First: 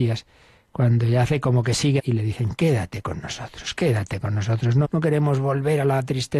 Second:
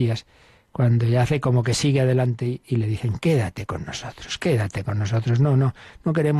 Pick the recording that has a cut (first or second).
first